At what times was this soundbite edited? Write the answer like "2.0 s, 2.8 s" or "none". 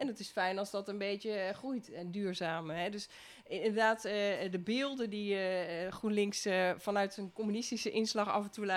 none